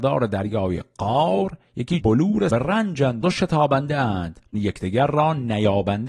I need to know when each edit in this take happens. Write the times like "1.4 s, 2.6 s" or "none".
2.0 s, 2.5 s, 3.2 s, 4.5 s

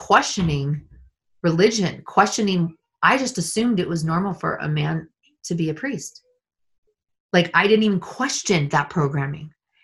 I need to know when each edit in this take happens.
none

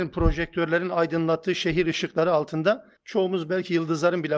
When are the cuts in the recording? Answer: 3.0 s

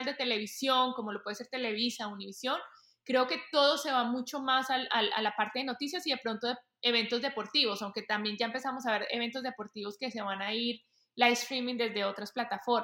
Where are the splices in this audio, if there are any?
none

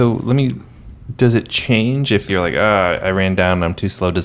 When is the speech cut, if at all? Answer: 2.3 s

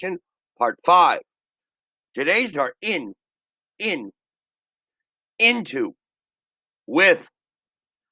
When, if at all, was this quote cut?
2.5 s, 3.7 s

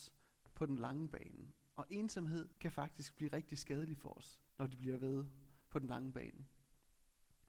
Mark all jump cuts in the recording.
2.5 s, 4.5 s

